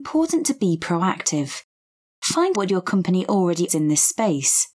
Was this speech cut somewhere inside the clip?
yes; 2 cuts; at 2.5 s, 3.7 s

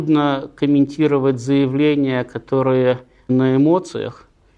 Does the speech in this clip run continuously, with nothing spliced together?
no; 1 cut; at 3.3 s

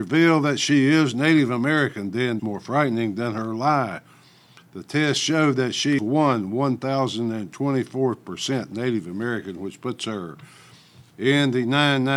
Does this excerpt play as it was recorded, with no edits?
no; 2 cuts; at 2.4 s, 6.0 s

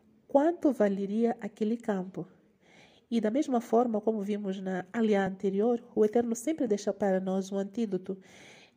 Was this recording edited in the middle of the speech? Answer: no; 0 cuts

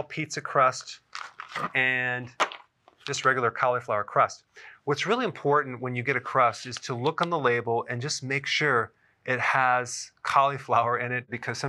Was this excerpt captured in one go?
yes; 0 cuts

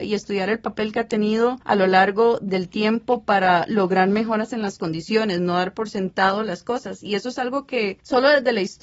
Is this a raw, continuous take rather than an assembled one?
yes; 0 cuts

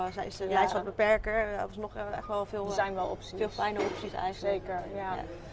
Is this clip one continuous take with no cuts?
yes; 0 cuts

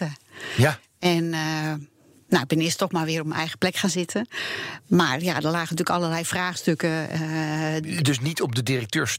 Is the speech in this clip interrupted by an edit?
no; 0 cuts

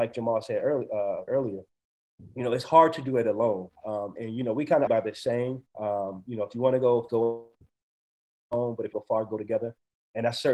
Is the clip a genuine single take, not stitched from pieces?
no; 5 cuts; at 1.3 s, 4.2 s, 4.9 s, 7.1 s, 8.9 s

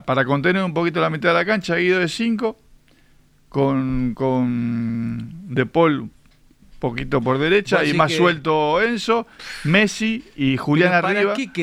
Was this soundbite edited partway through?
no; 0 cuts

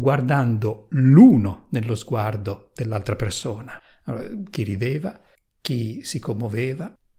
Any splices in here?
no; 0 cuts

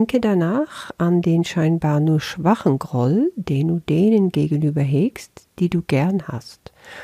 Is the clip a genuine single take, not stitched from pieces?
yes; 0 cuts

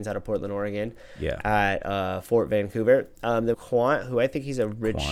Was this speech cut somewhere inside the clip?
yes; 1 cut; at 3.5 s

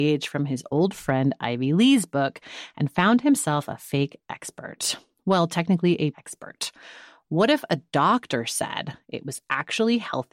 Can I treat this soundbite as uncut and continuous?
no; 1 cut; at 6.1 s

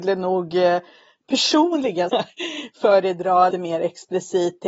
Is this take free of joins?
no; 2 cuts; at 2.1 s, 3.5 s

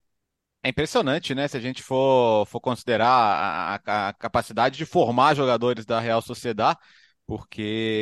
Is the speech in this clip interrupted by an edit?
no; 0 cuts

